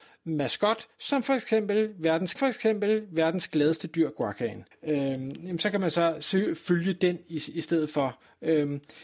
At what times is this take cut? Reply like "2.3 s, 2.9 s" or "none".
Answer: 2.3 s, 4.7 s